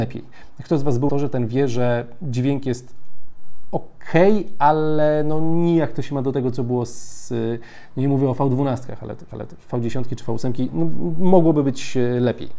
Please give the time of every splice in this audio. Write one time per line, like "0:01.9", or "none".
0:01.1
0:09.3